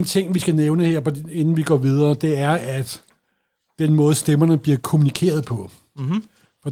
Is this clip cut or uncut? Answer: uncut